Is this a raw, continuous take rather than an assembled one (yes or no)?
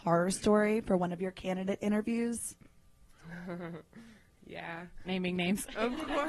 no